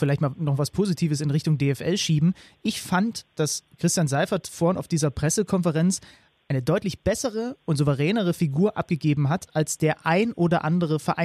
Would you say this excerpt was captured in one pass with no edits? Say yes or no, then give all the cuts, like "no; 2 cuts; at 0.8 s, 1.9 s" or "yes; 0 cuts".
yes; 0 cuts